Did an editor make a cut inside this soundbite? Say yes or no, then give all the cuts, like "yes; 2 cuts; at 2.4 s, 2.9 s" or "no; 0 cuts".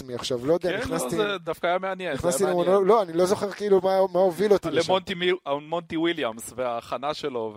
no; 0 cuts